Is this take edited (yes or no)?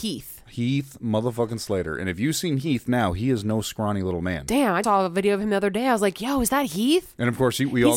yes